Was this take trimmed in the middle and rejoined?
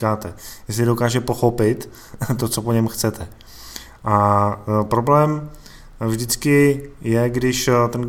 no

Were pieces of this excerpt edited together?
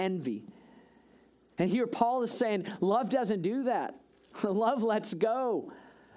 no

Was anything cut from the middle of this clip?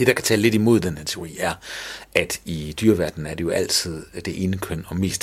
no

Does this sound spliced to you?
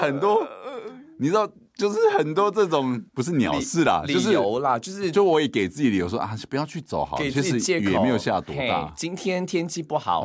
yes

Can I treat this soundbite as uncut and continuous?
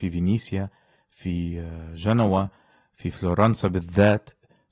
yes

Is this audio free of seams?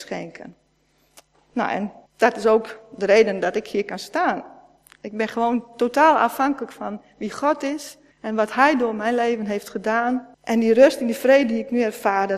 no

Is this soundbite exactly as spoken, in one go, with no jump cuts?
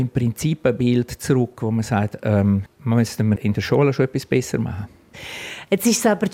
no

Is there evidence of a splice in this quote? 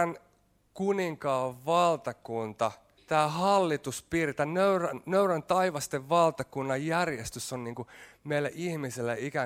yes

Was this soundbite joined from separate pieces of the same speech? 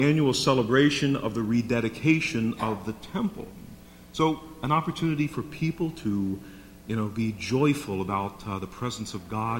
no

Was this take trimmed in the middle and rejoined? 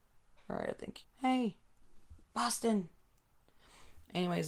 yes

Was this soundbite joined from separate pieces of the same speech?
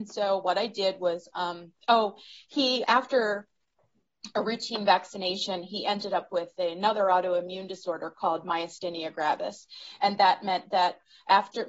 yes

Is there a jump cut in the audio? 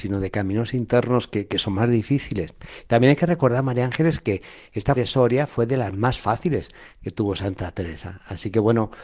yes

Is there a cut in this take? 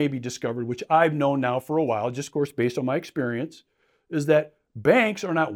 no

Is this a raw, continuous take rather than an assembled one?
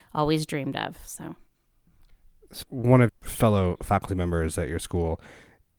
no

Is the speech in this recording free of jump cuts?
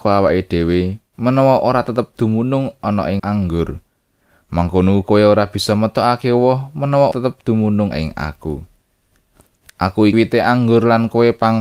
no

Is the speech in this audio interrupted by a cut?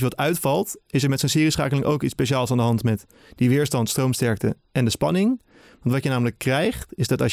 no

